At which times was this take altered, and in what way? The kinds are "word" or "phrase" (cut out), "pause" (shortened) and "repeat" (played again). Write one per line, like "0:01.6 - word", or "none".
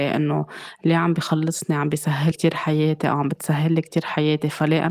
0:02.3 - word